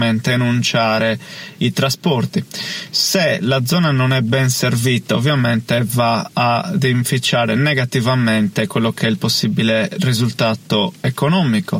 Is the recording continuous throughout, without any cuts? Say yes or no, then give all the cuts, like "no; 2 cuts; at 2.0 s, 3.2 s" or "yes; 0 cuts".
yes; 0 cuts